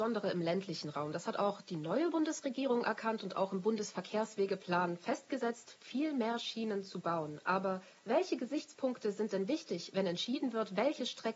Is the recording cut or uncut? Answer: uncut